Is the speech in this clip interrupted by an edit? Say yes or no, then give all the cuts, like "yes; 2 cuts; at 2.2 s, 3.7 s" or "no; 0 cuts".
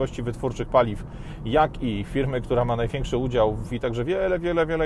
yes; 1 cut; at 3.7 s